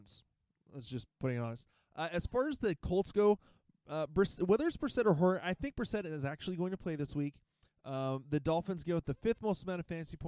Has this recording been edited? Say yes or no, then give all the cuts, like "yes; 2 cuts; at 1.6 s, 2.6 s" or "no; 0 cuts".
no; 0 cuts